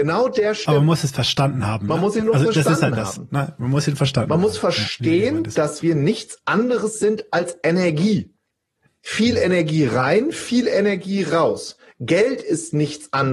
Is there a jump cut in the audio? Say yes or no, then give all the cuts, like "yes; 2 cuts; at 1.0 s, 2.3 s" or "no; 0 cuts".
no; 0 cuts